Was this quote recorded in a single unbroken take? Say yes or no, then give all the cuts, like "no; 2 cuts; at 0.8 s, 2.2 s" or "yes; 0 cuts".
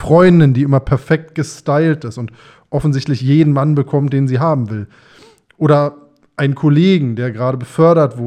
yes; 0 cuts